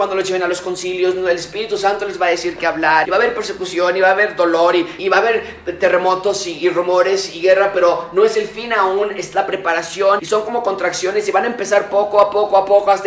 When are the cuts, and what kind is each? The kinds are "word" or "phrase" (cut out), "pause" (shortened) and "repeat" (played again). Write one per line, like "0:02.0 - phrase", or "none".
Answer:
0:03.0 - word
0:05.0 - word
0:10.2 - word